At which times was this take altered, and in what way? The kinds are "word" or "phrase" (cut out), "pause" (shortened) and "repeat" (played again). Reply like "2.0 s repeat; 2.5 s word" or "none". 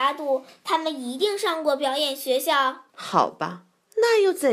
2.9 s pause